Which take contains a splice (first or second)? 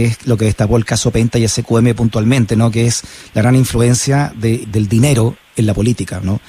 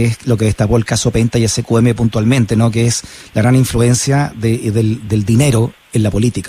first